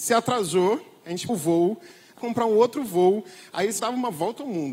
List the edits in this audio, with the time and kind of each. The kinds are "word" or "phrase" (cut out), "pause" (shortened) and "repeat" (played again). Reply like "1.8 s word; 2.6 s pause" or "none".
1.3 s word; 2.2 s word; 3.8 s word